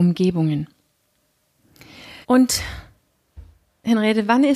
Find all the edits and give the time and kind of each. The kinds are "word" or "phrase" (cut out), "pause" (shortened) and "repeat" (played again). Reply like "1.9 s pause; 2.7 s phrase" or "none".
2.2 s pause